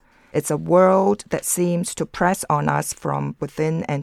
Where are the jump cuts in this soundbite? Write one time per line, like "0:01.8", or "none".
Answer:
none